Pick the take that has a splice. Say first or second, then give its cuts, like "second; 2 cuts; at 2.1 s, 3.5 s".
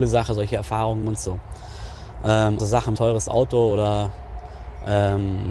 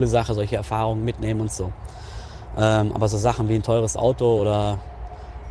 first; 3 cuts; at 1.0 s, 2.6 s, 3.0 s